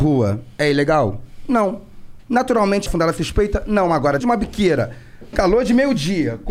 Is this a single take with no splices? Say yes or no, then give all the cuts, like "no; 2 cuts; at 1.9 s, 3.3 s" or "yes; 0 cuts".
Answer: no; 3 cuts; at 2.9 s, 4.2 s, 5.3 s